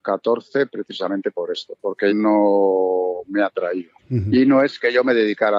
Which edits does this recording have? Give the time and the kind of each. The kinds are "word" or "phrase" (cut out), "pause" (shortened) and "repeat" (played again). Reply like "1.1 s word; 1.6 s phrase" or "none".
2.1 s word; 4.0 s pause

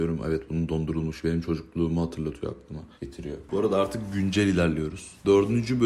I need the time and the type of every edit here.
3.0 s pause

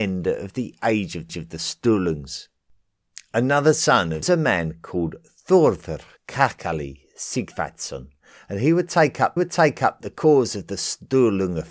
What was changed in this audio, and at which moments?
1.3 s repeat; 4.2 s phrase; 6.2 s pause; 9.4 s repeat

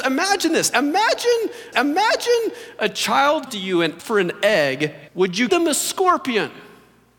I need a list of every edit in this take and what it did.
1.7 s repeat; 3.5 s word; 4.0 s word; 5.1 s pause; 5.5 s word

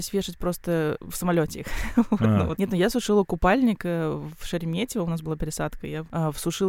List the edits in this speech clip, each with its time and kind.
none

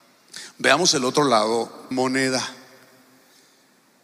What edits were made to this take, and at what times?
1.9 s phrase

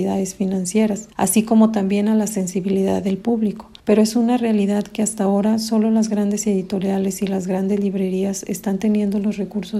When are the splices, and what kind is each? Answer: 1.1 s pause; 3.8 s pause

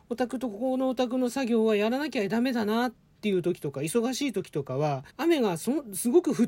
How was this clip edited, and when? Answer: 5.1 s pause

